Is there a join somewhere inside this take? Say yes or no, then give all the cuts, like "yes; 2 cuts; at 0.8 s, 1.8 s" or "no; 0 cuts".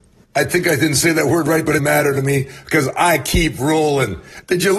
yes; 1 cut; at 1.8 s